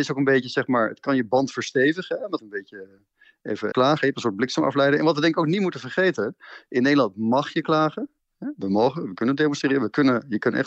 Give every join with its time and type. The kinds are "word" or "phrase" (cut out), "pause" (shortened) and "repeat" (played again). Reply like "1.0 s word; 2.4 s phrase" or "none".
2.4 s phrase; 3.7 s word